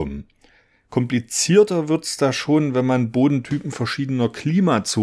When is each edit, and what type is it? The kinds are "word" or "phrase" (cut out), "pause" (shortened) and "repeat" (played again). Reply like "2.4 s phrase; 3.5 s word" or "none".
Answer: none